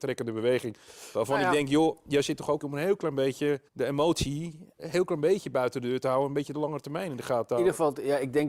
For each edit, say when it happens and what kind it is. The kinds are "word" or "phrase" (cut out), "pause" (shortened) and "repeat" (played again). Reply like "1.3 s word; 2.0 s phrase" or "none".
2.6 s phrase; 3.7 s pause; 4.8 s word